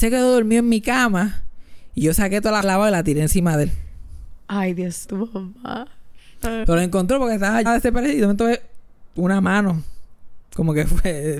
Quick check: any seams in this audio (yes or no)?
yes